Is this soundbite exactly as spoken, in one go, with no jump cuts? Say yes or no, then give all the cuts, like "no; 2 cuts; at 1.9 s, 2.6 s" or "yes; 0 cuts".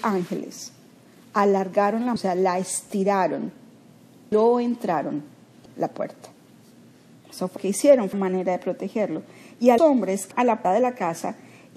no; 8 cuts; at 2.2 s, 4.3 s, 5.6 s, 7.6 s, 8.1 s, 9.8 s, 10.3 s, 10.6 s